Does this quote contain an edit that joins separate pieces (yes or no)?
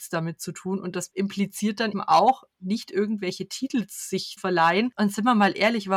yes